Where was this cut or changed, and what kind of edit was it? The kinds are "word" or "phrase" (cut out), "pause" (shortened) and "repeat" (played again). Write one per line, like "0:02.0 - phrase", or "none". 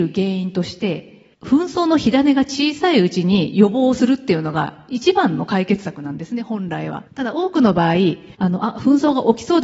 0:01.3 - pause
0:07.1 - pause
0:08.3 - pause